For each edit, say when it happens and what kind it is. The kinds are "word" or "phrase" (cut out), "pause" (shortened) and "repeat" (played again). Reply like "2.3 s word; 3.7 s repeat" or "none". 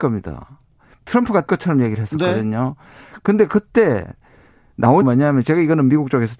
1.5 s word; 5.0 s word